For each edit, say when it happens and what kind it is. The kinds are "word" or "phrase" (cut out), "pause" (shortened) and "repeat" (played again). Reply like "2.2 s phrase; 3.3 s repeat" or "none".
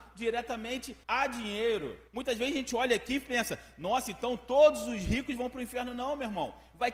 1.0 s pause; 2.1 s pause